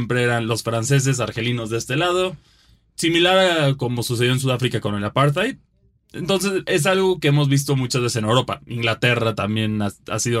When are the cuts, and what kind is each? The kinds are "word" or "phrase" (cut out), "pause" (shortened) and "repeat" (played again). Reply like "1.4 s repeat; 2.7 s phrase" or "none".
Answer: none